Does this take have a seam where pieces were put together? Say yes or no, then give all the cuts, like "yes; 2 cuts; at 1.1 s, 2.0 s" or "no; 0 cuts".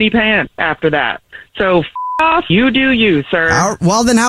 yes; 1 cut; at 2.5 s